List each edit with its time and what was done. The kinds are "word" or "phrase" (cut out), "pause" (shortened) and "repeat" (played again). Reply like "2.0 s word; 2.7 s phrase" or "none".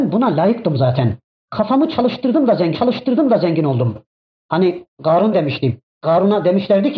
2.7 s repeat; 5.3 s word; 5.9 s pause